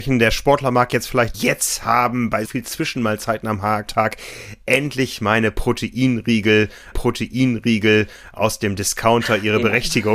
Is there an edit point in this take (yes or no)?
yes